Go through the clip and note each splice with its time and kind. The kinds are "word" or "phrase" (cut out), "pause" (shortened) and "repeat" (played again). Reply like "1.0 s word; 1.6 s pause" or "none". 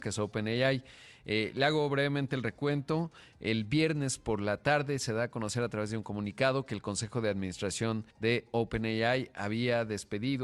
8.1 s pause